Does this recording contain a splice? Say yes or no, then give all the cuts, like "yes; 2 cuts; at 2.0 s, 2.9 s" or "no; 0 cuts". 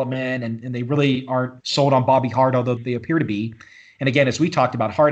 yes; 2 cuts; at 1.6 s, 2.8 s